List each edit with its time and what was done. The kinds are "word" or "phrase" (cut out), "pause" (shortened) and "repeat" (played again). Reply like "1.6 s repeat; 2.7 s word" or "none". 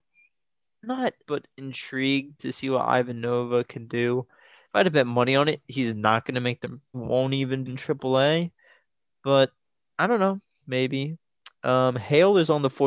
1.2 s word; 6.6 s word; 6.9 s word; 7.7 s word